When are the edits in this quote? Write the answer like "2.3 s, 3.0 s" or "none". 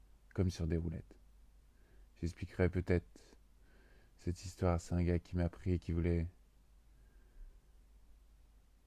none